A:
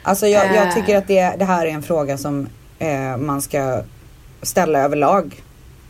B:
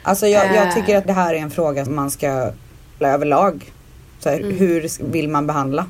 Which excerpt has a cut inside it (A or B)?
B